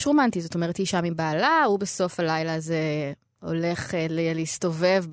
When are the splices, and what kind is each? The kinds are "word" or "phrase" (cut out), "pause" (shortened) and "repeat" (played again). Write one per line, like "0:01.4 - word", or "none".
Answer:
none

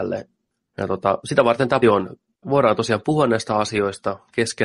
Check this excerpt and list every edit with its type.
0:01.8 - word
0:02.4 - word

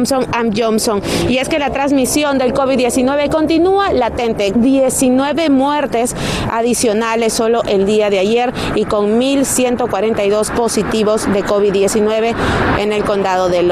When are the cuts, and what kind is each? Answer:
0:04.5 - word
0:10.5 - word

